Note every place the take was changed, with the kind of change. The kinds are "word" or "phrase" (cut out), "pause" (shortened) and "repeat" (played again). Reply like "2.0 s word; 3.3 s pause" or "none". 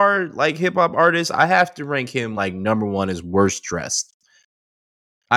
none